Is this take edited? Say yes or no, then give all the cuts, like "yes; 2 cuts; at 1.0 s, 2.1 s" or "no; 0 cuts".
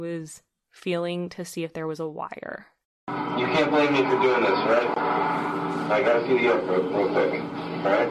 no; 0 cuts